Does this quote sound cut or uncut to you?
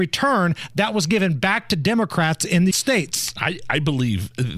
cut